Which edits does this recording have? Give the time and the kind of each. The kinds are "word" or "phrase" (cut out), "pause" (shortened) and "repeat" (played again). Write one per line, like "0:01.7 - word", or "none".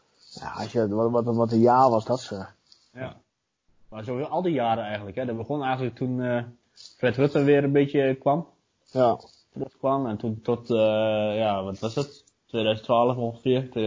none